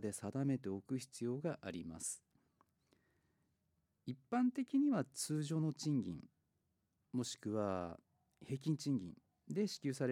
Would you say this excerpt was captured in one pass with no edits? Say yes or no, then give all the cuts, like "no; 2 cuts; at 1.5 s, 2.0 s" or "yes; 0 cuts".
yes; 0 cuts